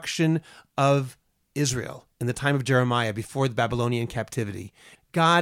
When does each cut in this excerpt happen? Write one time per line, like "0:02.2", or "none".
none